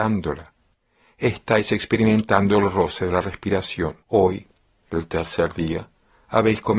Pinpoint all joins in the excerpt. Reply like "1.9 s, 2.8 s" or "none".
4.0 s